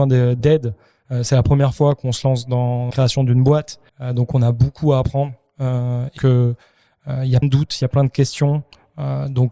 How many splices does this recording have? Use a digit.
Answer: 4